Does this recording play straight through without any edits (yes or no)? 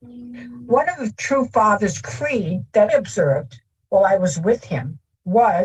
no